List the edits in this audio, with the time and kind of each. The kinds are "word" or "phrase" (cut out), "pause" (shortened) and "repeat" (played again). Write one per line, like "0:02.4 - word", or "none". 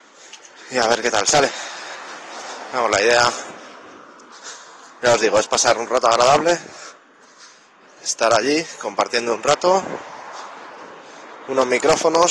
none